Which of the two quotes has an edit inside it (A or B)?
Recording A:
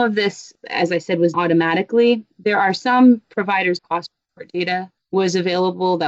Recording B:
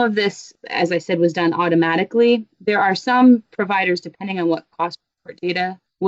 A